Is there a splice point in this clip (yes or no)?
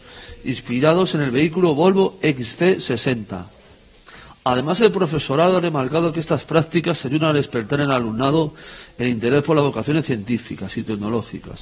no